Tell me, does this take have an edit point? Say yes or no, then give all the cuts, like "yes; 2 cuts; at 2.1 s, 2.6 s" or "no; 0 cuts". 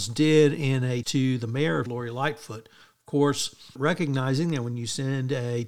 yes; 3 cuts; at 1.0 s, 1.9 s, 3.8 s